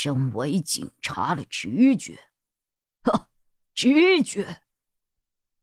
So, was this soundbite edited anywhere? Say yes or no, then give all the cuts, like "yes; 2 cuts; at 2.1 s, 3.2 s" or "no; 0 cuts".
no; 0 cuts